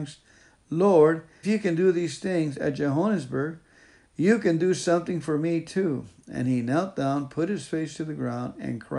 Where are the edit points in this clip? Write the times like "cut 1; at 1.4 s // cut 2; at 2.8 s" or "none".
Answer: cut 1; at 1.4 s